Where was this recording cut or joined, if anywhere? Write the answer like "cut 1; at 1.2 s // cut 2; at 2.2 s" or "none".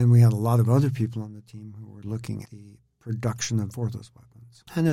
cut 1; at 2.5 s // cut 2; at 3.7 s